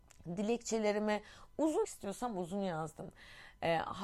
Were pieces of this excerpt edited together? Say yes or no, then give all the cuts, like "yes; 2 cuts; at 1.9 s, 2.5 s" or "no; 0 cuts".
yes; 1 cut; at 1.8 s